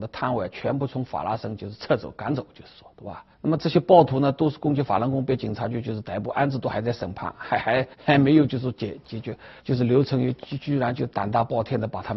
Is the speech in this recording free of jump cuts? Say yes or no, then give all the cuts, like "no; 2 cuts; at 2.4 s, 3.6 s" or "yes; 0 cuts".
no; 3 cuts; at 3.3 s, 7.9 s, 9.6 s